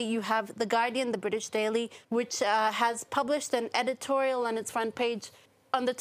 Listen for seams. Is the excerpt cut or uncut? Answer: cut